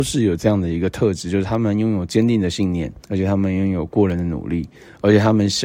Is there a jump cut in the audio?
yes; 1 cut; at 3.0 s

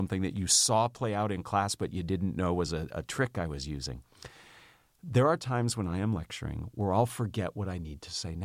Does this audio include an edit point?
no; 0 cuts

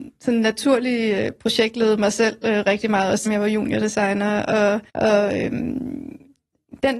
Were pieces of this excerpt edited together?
yes; 2 cuts; at 3.3 s, 4.9 s

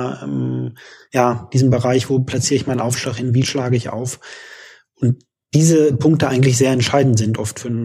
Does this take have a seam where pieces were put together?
no; 0 cuts

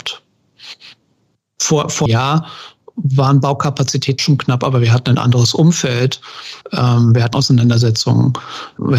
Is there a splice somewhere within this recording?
yes; 4 cuts; at 2.1 s, 4.2 s, 6.6 s, 7.3 s

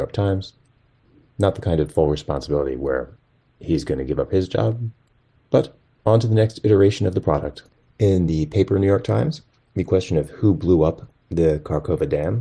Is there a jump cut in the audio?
no; 0 cuts

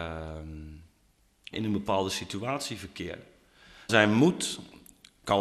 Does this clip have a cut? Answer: yes; 2 cuts; at 1.5 s, 3.9 s

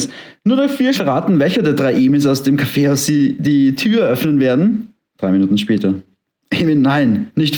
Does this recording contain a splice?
yes; 1 cut; at 0.9 s

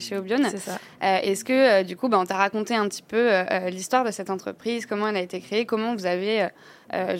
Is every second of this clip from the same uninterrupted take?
yes; 0 cuts

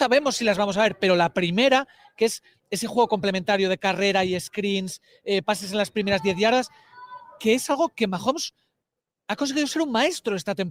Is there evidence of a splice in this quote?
no; 0 cuts

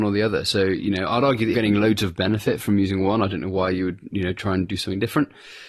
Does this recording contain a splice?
yes; 1 cut; at 1.5 s

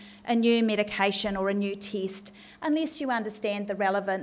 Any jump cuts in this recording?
no; 0 cuts

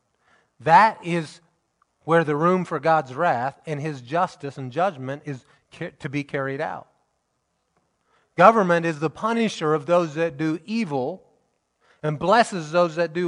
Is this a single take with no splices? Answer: yes; 0 cuts

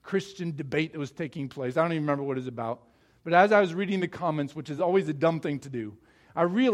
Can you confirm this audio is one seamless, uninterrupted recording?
yes; 0 cuts

